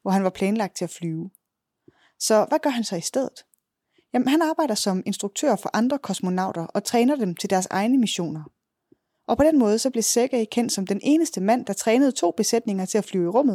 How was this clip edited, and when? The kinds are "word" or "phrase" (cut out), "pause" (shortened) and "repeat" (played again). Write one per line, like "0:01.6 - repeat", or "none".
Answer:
none